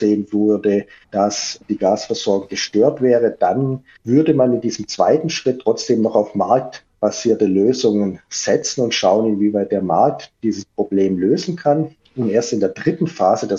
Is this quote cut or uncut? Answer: uncut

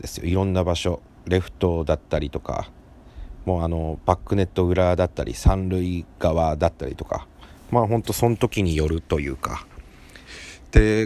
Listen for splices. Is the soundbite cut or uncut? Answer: uncut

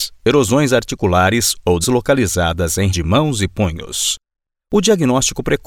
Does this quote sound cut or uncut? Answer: cut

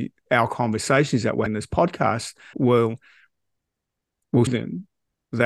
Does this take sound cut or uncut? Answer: cut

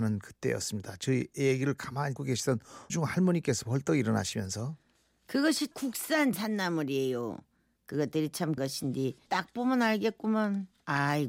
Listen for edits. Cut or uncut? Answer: cut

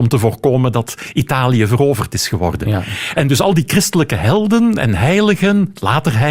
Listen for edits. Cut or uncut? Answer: uncut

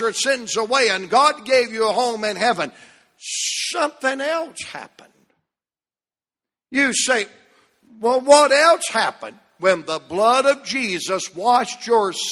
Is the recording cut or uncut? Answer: uncut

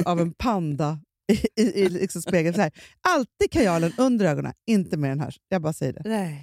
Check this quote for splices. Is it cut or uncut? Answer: uncut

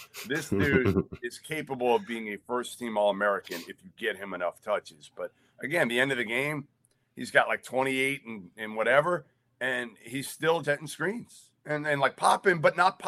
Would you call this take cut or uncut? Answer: cut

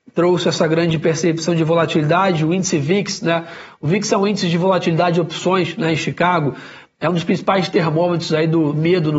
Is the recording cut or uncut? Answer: uncut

